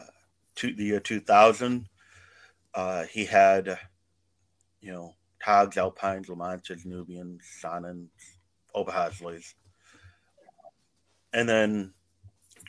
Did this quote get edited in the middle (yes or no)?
no